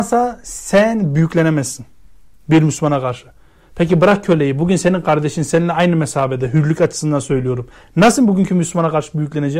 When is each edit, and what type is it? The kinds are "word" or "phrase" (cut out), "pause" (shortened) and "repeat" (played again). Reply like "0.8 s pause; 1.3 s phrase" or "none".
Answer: none